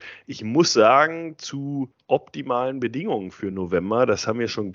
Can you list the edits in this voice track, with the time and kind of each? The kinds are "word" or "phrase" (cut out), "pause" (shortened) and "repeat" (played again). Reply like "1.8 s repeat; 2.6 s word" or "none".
none

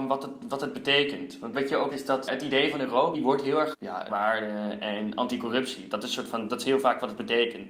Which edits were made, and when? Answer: 1.5 s word; 1.9 s word; 2.3 s word; 3.1 s phrase; 3.7 s phrase; 4.1 s word

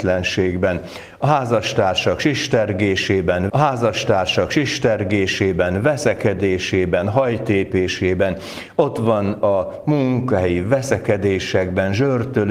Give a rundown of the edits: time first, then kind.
3.5 s repeat

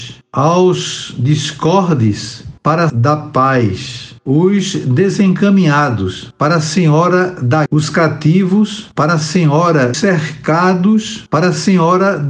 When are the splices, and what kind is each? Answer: 2.9 s word; 7.7 s word; 9.9 s phrase

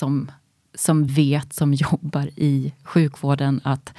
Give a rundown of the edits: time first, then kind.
1.1 s word

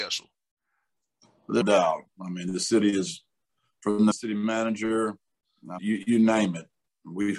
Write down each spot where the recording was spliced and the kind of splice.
1.6 s word; 4.1 s phrase; 5.8 s word

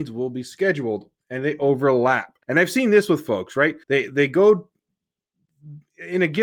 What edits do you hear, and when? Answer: 2.4 s pause; 3.8 s pause

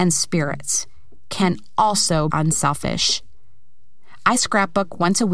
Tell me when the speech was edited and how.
2.3 s word

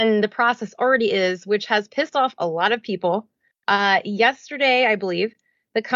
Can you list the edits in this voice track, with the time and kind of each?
none

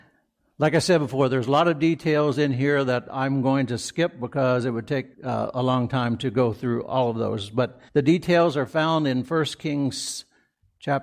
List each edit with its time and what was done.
5.1 s pause; 7.9 s pause

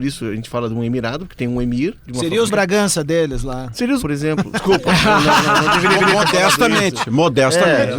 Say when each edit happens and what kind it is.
2.5 s word; 4.0 s word; 6.0 s repeat

